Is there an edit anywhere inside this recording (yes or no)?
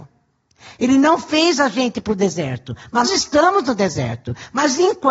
yes